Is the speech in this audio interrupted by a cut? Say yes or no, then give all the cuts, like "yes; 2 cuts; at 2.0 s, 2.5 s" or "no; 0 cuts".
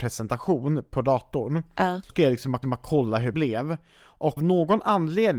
yes; 4 cuts; at 2.1 s, 2.6 s, 3.3 s, 4.4 s